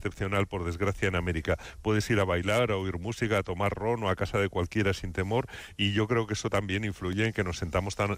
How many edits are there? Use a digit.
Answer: 0